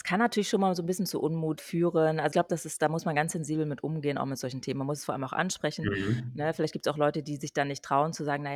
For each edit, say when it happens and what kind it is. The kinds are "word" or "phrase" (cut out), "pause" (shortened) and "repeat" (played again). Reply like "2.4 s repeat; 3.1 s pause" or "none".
1.6 s word; 2.3 s word